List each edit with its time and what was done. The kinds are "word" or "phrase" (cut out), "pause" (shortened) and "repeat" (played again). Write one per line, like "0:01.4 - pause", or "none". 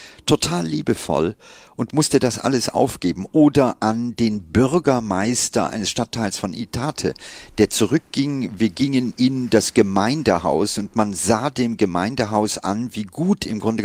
none